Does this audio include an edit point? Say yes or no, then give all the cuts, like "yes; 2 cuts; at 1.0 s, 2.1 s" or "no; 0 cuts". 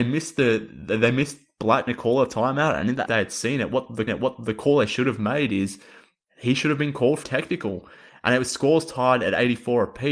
yes; 4 cuts; at 1.9 s, 3.1 s, 4.1 s, 7.2 s